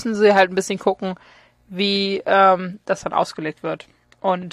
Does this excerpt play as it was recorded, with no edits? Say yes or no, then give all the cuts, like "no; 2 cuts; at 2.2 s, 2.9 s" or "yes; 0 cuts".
yes; 0 cuts